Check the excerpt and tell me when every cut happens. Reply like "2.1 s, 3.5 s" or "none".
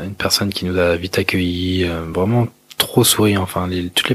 none